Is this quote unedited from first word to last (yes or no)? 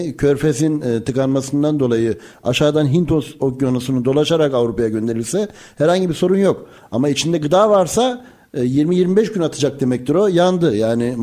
yes